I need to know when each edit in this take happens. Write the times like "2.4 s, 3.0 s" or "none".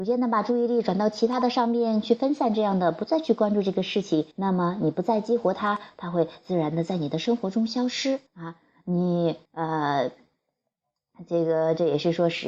4.3 s, 8.3 s, 9.5 s